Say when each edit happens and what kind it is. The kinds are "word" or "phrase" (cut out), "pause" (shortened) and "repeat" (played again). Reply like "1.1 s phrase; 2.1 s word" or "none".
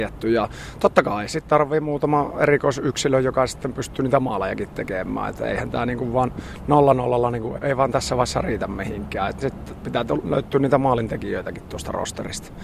7.6 s word